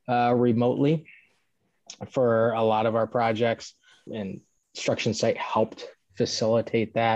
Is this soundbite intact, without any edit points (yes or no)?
no